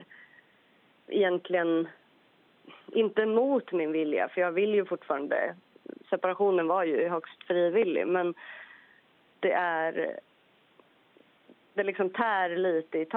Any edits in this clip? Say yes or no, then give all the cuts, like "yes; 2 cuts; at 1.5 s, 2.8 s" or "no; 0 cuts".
no; 0 cuts